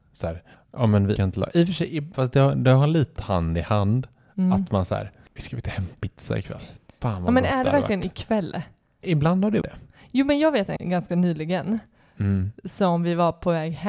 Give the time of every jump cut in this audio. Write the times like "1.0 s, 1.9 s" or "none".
1.2 s, 2.1 s, 3.2 s, 5.4 s, 6.0 s, 9.0 s, 9.6 s, 10.8 s